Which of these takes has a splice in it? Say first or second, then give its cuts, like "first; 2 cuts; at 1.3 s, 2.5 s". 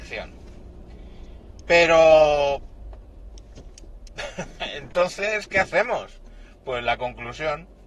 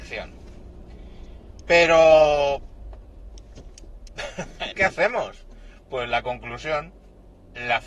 second; 1 cut; at 4.7 s